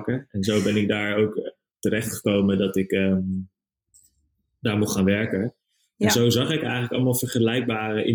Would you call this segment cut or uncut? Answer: uncut